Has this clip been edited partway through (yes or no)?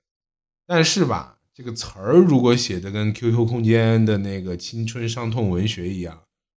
no